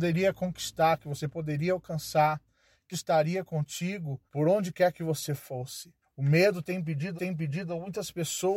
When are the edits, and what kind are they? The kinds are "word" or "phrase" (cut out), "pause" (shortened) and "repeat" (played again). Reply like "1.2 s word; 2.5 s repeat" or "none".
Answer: 2.9 s word; 4.3 s pause; 6.0 s pause; 7.2 s repeat